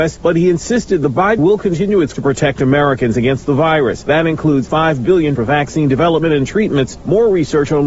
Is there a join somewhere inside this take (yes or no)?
yes